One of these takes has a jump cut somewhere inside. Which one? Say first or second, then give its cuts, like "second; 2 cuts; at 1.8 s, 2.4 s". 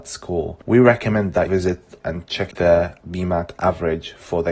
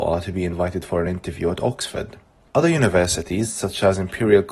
first; 3 cuts; at 1.5 s, 2.0 s, 2.5 s